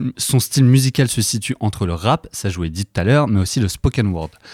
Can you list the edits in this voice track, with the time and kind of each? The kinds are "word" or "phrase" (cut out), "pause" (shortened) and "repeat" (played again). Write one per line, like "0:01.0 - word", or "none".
none